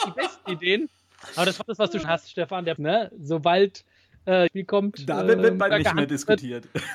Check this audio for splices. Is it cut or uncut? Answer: cut